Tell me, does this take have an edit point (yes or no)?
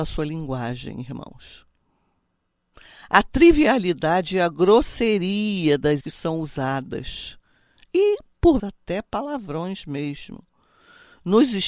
yes